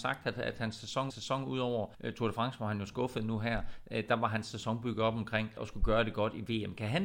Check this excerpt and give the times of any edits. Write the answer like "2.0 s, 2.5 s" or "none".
1.1 s, 1.9 s, 5.6 s